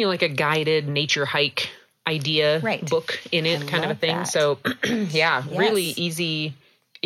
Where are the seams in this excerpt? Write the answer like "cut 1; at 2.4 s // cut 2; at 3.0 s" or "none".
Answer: none